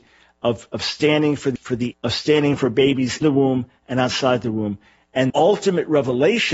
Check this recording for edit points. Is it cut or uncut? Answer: cut